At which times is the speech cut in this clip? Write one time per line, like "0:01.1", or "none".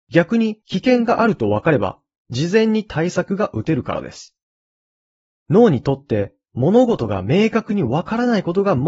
none